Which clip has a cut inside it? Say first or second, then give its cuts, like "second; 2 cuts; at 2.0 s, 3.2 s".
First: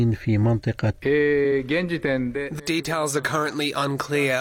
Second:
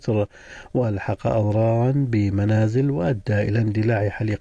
first; 2 cuts; at 0.9 s, 2.6 s